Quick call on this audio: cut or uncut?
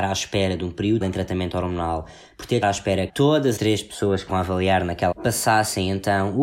cut